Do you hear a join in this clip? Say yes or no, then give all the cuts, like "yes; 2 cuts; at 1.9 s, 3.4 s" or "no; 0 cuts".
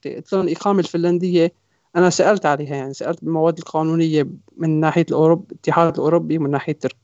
no; 0 cuts